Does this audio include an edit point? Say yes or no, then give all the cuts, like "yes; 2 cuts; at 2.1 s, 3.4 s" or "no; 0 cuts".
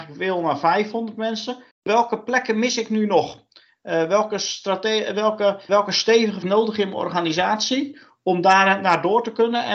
yes; 3 cuts; at 1.7 s, 5.7 s, 6.4 s